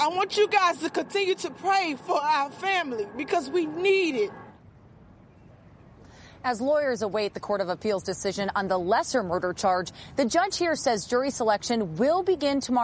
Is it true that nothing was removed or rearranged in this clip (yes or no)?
yes